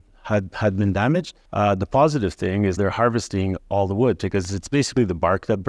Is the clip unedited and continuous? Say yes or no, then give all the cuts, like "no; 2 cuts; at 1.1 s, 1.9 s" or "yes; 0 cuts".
no; 2 cuts; at 1.5 s, 2.8 s